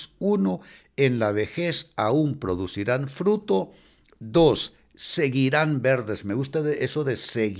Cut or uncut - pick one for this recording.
uncut